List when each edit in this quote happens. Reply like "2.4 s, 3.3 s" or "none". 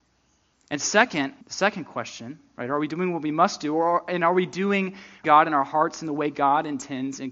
1.4 s, 5.2 s